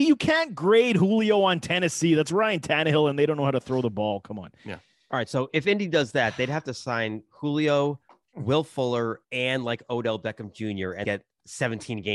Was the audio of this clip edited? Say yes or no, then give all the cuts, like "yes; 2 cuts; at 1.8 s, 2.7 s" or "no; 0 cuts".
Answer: yes; 2 cuts; at 9.2 s, 11.0 s